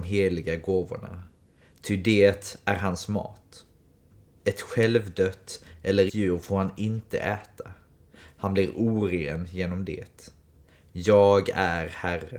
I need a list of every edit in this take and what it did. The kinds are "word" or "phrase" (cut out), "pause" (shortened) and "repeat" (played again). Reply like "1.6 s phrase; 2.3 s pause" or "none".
6.1 s word